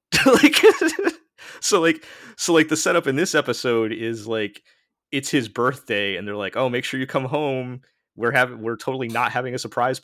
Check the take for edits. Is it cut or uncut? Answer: uncut